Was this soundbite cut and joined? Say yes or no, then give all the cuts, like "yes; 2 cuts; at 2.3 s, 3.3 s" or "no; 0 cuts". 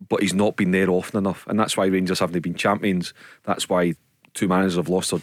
no; 0 cuts